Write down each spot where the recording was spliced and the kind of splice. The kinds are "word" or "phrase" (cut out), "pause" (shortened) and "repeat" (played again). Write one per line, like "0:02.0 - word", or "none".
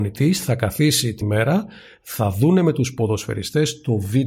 0:01.2 - word